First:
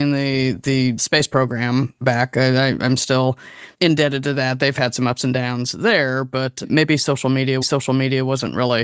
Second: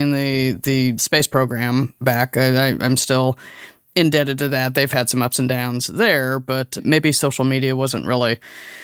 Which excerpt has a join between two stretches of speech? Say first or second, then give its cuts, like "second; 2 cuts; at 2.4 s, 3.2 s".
first; 2 cuts; at 3.7 s, 7.6 s